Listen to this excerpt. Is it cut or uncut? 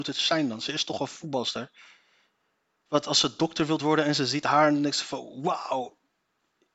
uncut